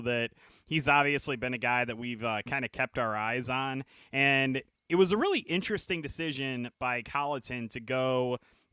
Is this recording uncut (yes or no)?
yes